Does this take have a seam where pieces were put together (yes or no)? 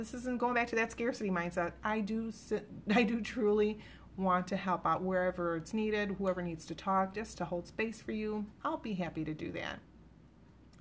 no